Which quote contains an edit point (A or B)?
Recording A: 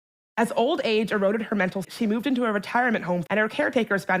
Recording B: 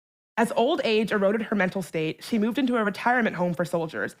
A